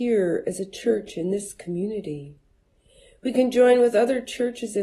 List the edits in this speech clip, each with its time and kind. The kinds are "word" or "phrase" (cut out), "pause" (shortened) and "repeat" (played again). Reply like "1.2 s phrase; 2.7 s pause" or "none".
none